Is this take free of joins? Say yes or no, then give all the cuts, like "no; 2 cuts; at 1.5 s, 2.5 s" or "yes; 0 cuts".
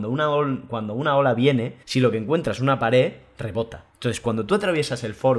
no; 2 cuts; at 1.8 s, 3.9 s